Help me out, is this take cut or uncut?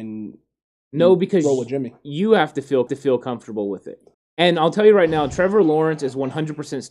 cut